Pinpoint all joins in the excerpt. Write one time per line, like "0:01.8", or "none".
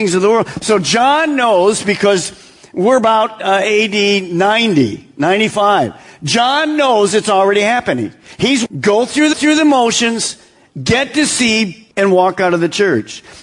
0:08.7
0:09.3
0:11.9